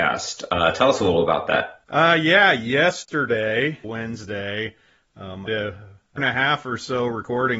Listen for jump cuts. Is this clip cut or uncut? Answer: cut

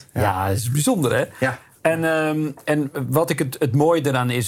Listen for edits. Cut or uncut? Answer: uncut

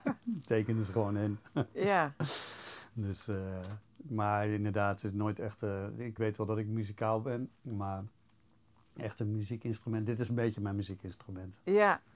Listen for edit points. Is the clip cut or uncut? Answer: cut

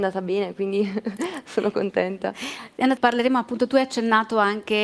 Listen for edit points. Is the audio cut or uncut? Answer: cut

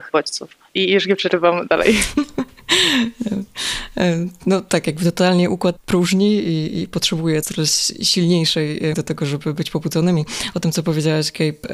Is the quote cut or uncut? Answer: cut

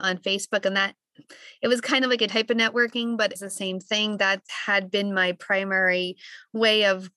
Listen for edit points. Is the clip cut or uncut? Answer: cut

